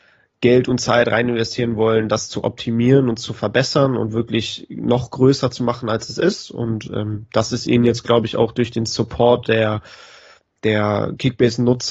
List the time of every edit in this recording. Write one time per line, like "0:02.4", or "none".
none